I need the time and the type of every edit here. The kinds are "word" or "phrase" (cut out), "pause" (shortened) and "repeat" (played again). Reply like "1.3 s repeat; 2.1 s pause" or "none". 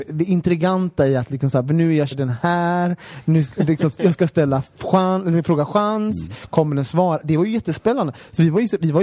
2.1 s word